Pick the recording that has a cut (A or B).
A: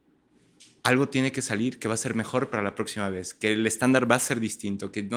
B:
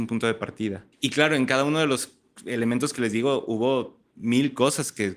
B